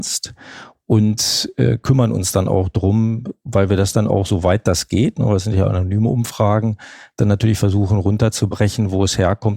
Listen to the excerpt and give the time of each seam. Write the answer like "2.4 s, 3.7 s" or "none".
none